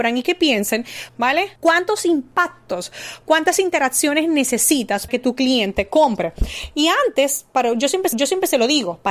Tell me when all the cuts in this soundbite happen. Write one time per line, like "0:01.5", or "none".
0:01.1
0:01.6
0:05.1
0:08.1